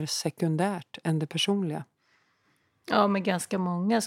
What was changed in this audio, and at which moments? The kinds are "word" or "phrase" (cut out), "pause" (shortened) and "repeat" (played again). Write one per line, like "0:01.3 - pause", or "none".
none